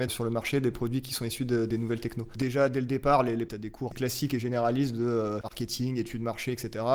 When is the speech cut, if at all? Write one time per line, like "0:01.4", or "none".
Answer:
0:03.5